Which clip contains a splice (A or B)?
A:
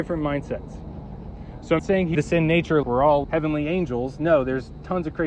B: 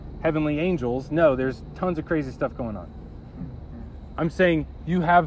A